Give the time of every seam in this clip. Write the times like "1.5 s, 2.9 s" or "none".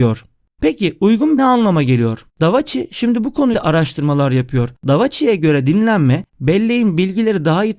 1.4 s, 2.3 s, 3.5 s, 4.8 s, 6.3 s